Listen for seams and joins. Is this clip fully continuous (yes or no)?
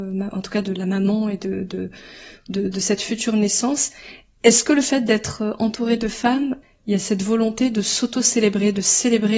yes